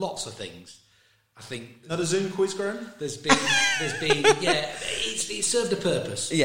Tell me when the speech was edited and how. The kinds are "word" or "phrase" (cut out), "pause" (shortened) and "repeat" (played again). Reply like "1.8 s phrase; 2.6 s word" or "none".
none